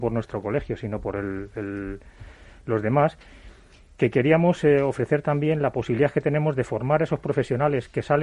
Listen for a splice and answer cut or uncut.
uncut